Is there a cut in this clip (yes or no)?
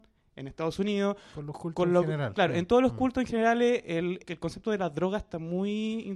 yes